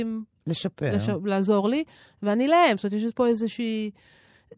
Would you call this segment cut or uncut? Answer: uncut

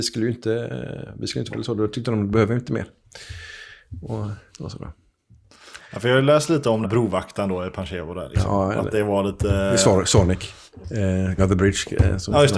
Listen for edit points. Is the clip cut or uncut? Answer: cut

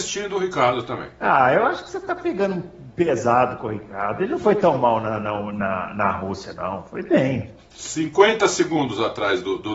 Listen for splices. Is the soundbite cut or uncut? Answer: uncut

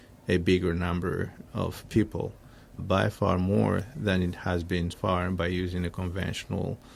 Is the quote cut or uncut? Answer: cut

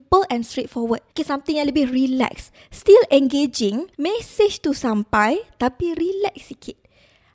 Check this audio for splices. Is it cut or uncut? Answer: cut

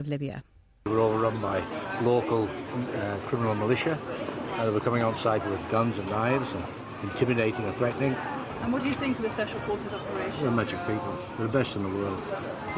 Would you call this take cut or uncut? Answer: cut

